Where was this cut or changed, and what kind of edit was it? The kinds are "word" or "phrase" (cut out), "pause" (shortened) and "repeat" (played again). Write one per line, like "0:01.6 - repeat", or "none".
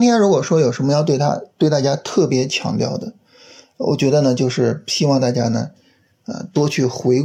none